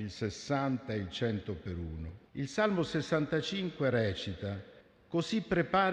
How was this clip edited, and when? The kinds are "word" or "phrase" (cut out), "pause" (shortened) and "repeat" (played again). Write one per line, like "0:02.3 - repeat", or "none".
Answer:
0:02.3 - pause
0:04.8 - pause